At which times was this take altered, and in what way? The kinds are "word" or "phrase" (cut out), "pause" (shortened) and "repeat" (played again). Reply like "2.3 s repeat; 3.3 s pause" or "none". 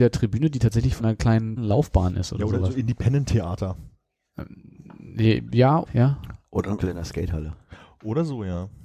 1.0 s word; 1.6 s word; 5.9 s word; 6.8 s word